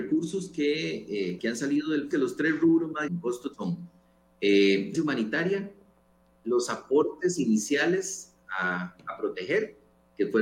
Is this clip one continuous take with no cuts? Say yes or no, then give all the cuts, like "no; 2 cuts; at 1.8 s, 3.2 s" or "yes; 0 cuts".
no; 5 cuts; at 1.4 s, 2.1 s, 3.1 s, 3.5 s, 4.9 s